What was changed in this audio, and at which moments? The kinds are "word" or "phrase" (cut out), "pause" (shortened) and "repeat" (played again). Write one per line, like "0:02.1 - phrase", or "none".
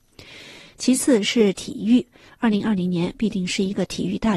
none